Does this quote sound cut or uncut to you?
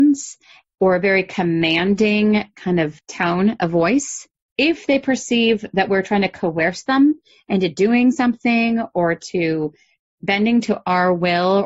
uncut